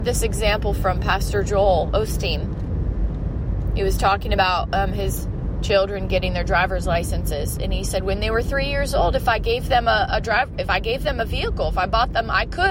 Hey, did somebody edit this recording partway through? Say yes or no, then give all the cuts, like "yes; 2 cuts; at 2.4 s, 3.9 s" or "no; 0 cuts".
no; 0 cuts